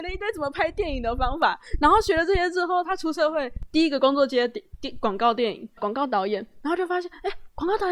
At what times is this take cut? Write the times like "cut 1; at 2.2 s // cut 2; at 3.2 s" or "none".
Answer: cut 1; at 5.8 s